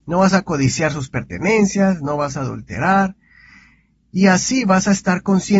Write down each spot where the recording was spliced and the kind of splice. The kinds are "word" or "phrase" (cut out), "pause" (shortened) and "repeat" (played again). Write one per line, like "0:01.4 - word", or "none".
none

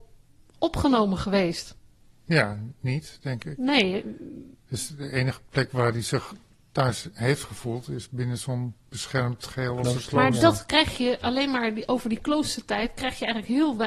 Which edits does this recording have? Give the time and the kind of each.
none

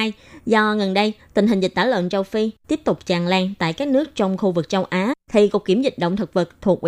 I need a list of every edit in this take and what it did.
0:05.2 - pause

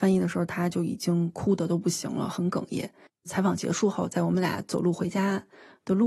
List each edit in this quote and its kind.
0:03.1 - pause

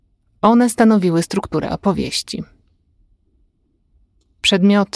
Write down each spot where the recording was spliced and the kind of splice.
none

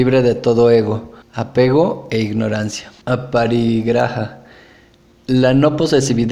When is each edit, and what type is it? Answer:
0:01.2 - pause
0:03.0 - pause

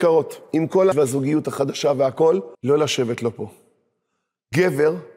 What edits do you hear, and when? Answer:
0:00.9 - phrase
0:02.5 - pause

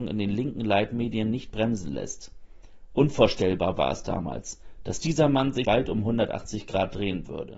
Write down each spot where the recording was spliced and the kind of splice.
0:05.6 - word

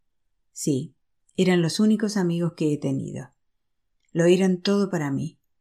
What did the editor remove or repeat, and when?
none

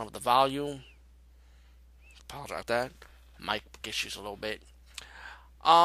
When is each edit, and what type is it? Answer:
0:02.6 - word
0:03.8 - word

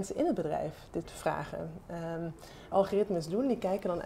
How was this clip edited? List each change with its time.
0:01.0 - word
0:02.7 - phrase

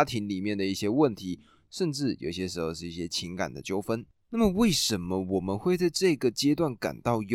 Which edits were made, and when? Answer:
none

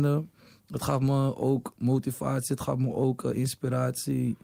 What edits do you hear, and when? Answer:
none

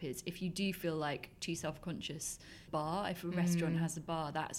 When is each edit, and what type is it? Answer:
0:02.7 - phrase

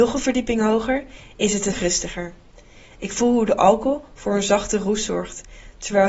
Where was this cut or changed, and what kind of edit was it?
0:01.7 - word

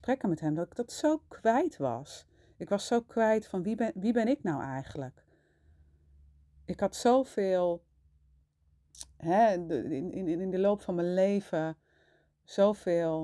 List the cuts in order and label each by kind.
none

